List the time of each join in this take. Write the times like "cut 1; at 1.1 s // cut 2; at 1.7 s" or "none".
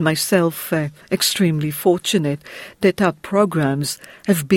none